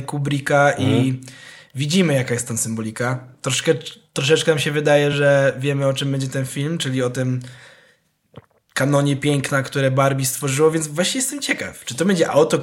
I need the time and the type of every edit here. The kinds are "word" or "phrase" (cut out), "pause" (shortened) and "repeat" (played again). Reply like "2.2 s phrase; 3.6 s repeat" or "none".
none